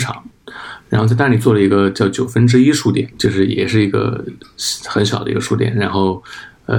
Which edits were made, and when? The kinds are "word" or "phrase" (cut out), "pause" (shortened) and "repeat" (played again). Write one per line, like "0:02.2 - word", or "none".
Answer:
0:03.1 - pause